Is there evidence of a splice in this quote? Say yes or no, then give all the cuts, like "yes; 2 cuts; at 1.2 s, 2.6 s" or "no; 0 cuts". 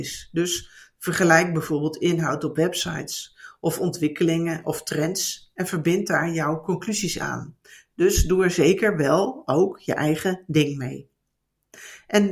no; 0 cuts